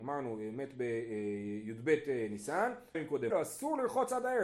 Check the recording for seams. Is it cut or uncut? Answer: cut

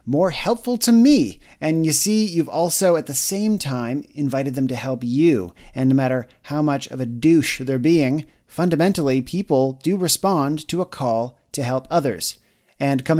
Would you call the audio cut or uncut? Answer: uncut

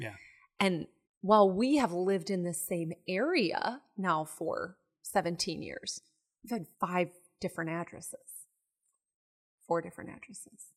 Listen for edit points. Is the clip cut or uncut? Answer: cut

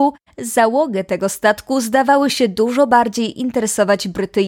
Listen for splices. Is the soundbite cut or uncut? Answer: uncut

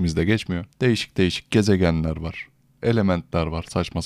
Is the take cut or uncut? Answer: uncut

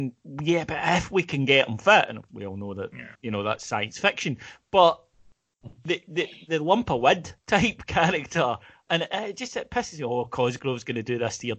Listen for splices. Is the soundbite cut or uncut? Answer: cut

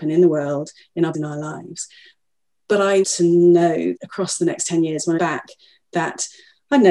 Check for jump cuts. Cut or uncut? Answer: cut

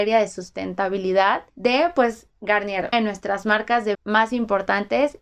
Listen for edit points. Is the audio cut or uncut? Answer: cut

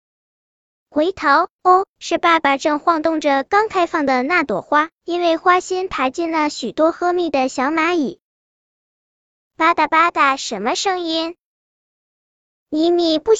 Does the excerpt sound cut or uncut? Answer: uncut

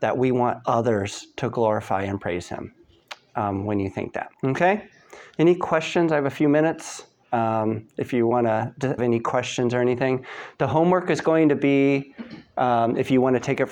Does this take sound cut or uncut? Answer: cut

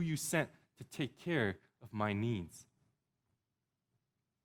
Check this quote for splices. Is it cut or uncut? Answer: uncut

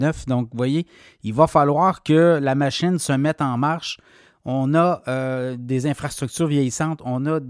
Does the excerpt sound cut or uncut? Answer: uncut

